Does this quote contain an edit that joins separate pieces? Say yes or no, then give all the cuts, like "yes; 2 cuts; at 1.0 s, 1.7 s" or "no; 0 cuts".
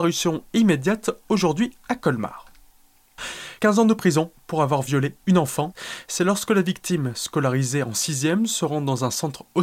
no; 0 cuts